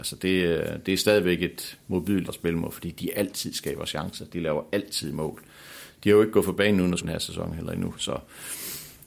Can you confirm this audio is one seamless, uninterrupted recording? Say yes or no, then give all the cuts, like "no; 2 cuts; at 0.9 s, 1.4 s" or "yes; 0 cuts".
no; 2 cuts; at 2.3 s, 7.0 s